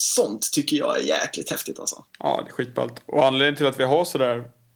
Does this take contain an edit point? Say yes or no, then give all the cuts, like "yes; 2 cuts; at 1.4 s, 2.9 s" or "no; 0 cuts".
yes; 1 cut; at 2.1 s